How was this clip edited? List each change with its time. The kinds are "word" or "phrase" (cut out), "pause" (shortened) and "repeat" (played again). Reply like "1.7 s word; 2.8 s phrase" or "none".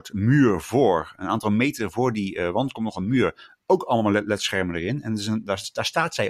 none